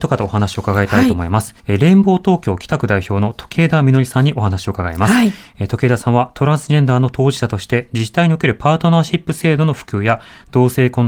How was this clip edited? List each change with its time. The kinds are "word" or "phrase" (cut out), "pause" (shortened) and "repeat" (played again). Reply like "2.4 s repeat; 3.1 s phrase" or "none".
1.6 s pause